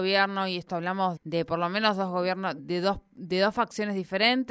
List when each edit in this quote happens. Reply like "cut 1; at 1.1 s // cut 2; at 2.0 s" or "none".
cut 1; at 1.2 s // cut 2; at 2.6 s